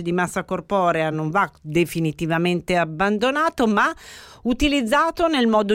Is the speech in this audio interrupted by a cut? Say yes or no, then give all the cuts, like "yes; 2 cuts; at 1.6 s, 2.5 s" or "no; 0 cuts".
no; 0 cuts